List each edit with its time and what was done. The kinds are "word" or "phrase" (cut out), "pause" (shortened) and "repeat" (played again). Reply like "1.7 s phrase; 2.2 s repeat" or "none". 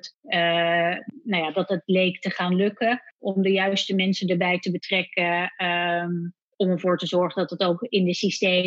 none